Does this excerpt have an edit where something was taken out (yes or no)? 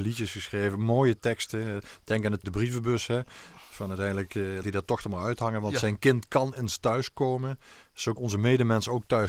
yes